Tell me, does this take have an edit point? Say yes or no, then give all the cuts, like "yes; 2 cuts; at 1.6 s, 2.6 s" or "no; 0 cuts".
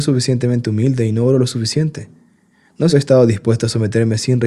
yes; 1 cut; at 2.9 s